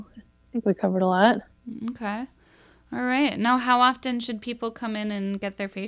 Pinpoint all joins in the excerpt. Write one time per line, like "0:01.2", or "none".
none

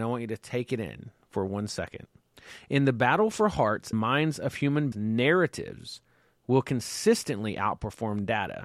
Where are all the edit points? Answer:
0:03.9
0:04.9

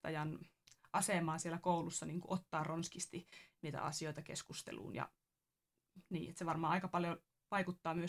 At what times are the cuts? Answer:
none

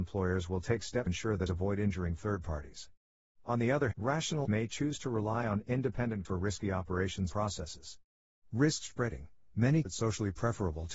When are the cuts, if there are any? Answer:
0:01.1
0:01.5
0:03.9
0:04.4
0:06.2
0:07.3
0:09.8

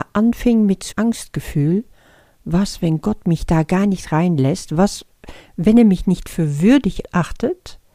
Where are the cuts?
0:00.9

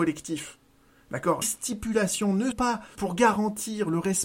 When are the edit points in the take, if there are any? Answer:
0:01.4
0:02.5
0:03.0

